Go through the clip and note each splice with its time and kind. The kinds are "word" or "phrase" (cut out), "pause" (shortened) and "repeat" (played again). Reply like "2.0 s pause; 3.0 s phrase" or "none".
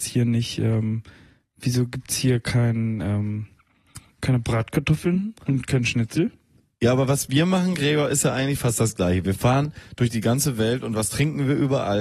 none